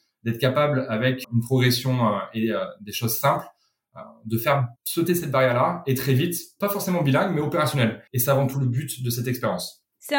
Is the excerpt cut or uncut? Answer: cut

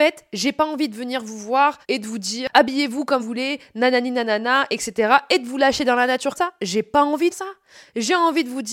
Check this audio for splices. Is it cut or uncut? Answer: cut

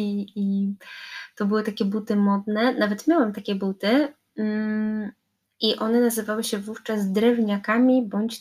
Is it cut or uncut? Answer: uncut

